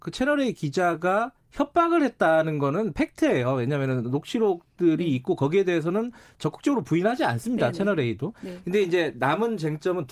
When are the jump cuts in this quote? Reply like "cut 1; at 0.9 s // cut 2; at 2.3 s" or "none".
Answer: none